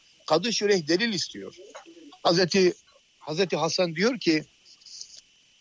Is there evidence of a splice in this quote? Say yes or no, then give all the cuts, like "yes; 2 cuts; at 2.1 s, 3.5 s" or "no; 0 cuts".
no; 0 cuts